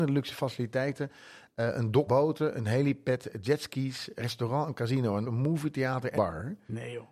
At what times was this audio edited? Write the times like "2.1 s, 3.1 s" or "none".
2.1 s, 4.2 s, 5.2 s, 6.2 s